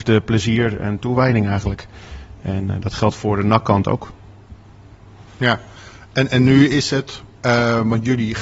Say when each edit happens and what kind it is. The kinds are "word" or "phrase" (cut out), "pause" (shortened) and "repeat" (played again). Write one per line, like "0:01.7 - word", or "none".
0:05.3 - pause